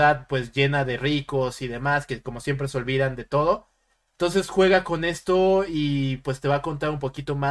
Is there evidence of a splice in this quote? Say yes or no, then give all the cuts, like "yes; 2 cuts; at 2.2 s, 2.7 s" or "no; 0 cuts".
no; 0 cuts